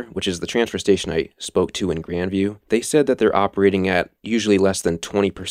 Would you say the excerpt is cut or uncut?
cut